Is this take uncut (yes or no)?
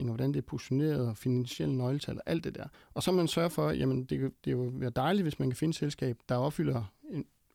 no